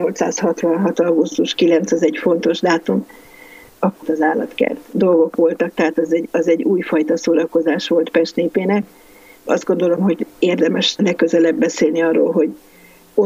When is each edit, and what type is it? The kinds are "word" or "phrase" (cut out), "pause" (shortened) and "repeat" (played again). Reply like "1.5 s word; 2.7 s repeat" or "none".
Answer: 4.0 s word; 4.9 s word; 11.0 s word